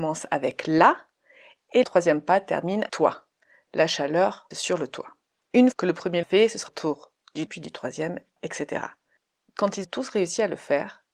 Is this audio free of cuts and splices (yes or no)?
no